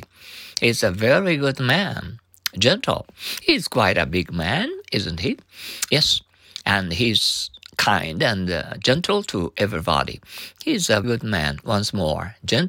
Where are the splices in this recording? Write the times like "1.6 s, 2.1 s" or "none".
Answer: 11.0 s